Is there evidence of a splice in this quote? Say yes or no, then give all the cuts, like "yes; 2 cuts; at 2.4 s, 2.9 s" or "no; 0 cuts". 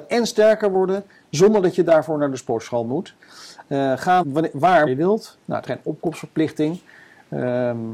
yes; 3 cuts; at 4.2 s, 4.9 s, 5.7 s